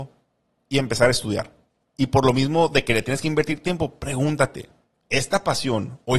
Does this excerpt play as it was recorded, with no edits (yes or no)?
yes